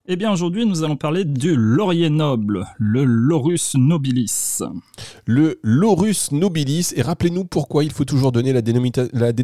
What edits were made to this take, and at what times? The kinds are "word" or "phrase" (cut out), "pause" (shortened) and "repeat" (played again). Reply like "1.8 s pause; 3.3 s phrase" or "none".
none